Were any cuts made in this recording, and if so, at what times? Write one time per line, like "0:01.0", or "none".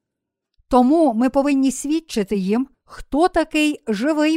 0:02.7